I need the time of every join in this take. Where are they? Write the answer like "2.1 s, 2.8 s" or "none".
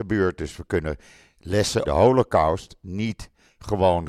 1.8 s